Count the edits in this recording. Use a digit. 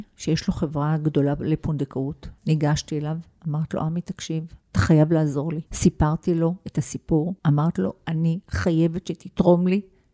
4